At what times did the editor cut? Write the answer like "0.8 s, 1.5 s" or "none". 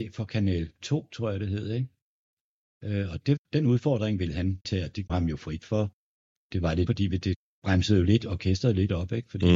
3.2 s, 4.6 s, 5.1 s, 6.9 s